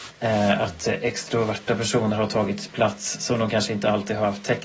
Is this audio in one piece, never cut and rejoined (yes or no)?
yes